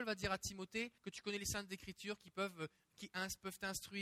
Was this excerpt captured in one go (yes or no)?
no